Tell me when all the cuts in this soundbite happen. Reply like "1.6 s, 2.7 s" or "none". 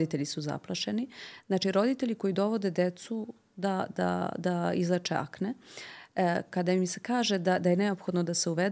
none

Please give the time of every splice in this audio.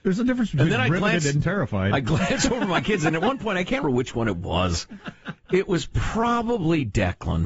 3.8 s

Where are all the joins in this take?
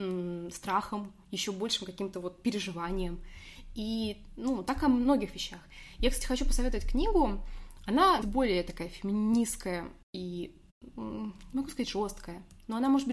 8.2 s, 10.0 s

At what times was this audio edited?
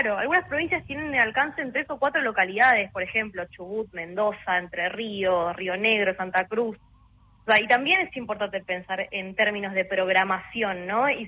none

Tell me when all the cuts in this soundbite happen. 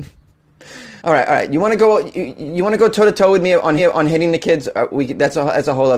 1.0 s, 3.8 s

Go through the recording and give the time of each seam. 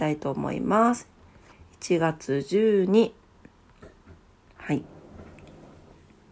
none

